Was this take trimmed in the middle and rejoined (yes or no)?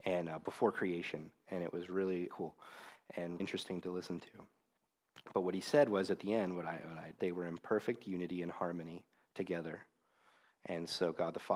yes